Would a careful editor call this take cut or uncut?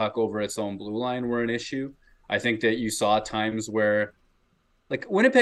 uncut